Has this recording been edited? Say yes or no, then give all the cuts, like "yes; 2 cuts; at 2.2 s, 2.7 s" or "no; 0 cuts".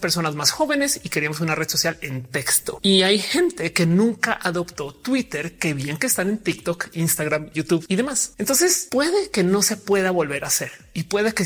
no; 0 cuts